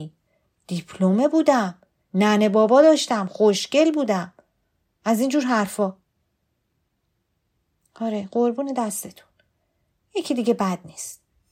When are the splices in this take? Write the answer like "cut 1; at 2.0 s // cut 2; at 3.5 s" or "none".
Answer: none